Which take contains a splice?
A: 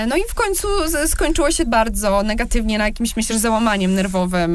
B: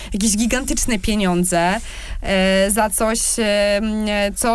A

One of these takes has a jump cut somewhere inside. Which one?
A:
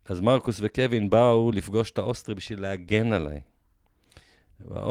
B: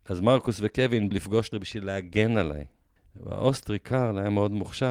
B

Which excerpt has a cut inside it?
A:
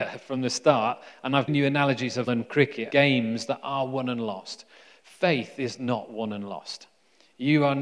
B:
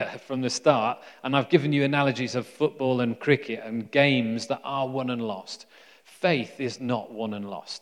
A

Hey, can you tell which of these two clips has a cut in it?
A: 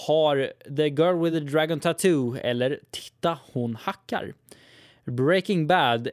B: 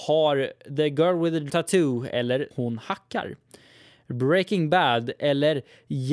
B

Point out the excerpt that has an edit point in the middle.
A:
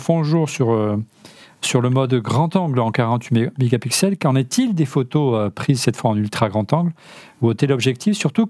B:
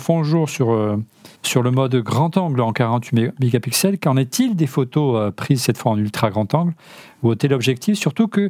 B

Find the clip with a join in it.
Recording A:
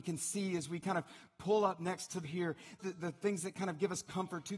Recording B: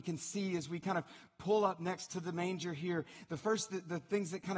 A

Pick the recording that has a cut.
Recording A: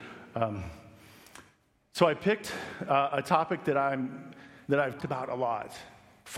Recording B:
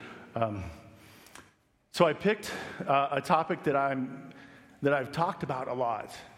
A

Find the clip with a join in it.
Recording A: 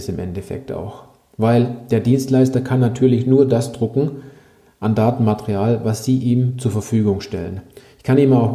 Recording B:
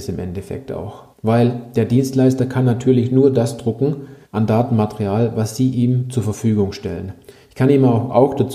B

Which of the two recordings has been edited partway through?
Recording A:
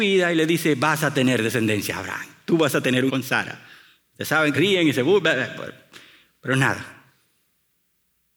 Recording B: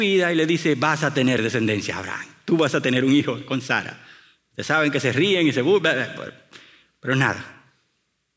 A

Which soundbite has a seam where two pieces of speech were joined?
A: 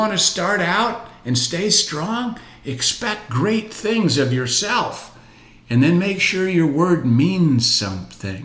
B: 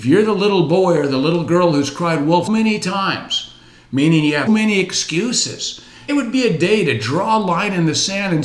B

